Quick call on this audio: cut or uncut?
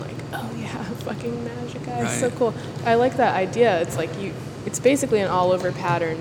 uncut